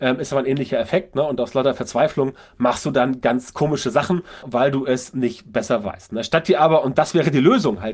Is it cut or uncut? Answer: cut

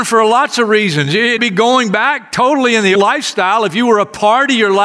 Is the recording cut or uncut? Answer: cut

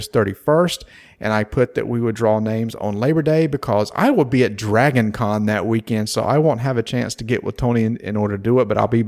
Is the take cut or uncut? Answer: uncut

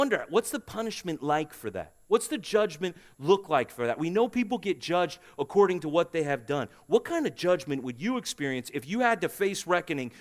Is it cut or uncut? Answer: uncut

